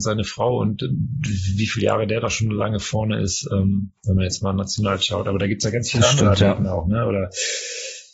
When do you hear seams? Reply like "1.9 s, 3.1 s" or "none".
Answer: 4.0 s